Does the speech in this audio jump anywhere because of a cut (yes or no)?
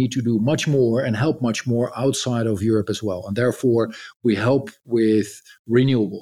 no